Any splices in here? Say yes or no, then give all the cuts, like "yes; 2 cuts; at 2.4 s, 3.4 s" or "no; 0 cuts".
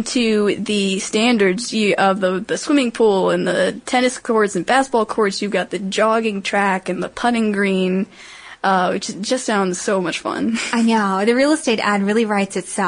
no; 0 cuts